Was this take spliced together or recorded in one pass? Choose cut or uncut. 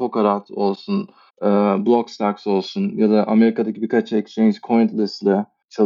cut